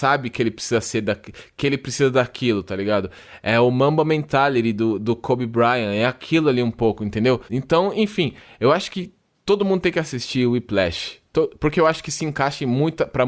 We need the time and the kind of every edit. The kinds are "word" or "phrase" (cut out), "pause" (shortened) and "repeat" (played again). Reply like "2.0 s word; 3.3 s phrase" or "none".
7.5 s pause